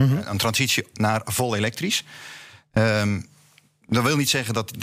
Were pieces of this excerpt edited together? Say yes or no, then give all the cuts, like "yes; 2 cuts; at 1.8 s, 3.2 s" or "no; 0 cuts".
no; 0 cuts